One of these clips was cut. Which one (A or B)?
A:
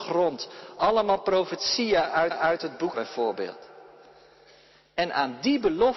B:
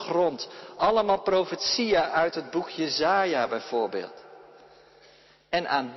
A